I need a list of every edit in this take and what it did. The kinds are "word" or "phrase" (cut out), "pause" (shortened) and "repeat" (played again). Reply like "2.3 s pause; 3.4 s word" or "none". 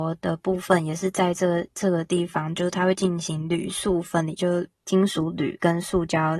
4.7 s pause